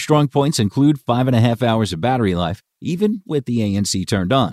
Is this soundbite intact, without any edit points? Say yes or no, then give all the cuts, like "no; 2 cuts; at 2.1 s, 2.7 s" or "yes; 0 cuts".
yes; 0 cuts